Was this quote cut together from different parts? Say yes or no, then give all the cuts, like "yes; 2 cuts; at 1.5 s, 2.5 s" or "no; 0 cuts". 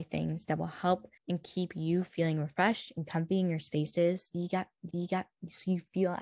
yes; 2 cuts; at 1.2 s, 4.9 s